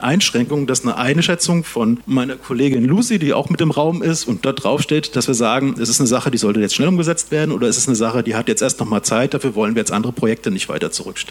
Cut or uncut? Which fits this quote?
cut